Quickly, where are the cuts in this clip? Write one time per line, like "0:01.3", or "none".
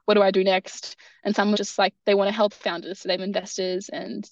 0:01.6
0:02.5
0:03.2